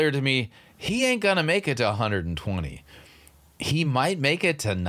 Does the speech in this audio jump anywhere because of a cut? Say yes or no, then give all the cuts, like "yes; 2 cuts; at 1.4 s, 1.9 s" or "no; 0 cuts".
no; 0 cuts